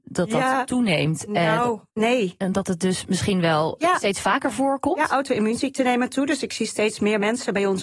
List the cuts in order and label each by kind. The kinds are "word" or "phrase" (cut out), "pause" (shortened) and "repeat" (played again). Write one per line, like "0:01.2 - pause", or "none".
0:01.9 - pause